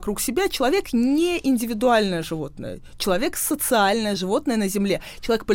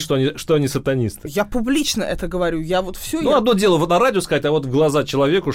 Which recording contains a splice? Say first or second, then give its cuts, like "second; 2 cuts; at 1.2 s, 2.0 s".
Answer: first; 1 cut; at 4.2 s